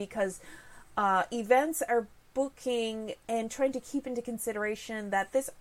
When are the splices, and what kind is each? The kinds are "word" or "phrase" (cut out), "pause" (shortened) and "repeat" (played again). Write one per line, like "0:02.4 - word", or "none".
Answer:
none

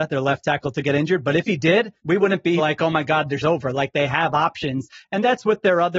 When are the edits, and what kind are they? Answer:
0:02.0 - pause
0:02.6 - word
0:03.4 - word

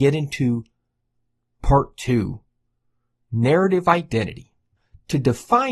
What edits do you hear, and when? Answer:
none

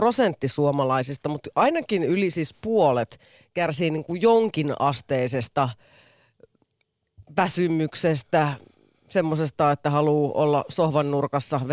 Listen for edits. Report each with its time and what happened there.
none

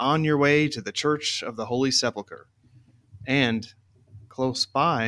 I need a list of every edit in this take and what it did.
none

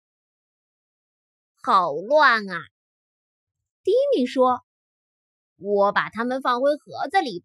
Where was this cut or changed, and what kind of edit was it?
none

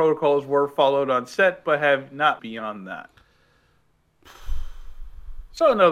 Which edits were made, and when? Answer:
0:02.4 - word

